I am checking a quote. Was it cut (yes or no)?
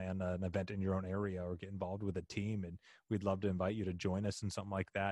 no